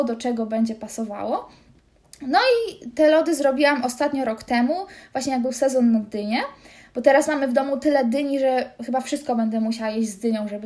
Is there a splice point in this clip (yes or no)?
no